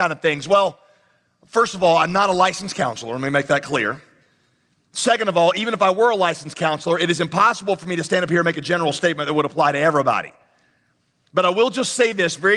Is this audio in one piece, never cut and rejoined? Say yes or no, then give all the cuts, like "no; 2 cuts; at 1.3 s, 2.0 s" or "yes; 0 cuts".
yes; 0 cuts